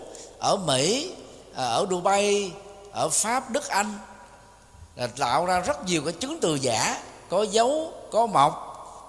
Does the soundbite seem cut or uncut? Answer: uncut